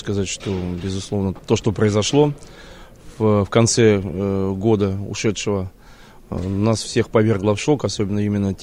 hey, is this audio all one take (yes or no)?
yes